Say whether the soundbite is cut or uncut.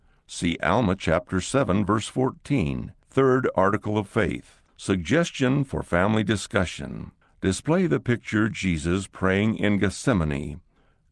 cut